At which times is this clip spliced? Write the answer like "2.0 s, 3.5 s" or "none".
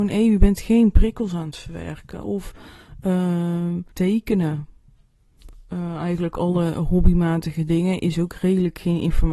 3.9 s